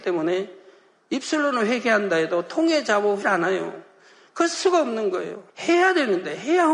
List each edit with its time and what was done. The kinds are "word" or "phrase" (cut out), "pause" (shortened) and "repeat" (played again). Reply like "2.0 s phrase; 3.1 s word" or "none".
3.2 s phrase; 4.5 s word; 5.5 s pause